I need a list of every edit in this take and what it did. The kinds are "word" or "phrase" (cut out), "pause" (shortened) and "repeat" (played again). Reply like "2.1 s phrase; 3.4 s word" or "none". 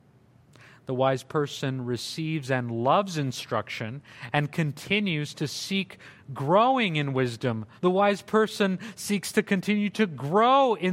7.8 s pause